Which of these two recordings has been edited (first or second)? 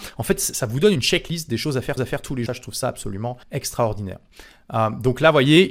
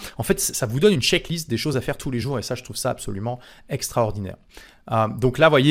first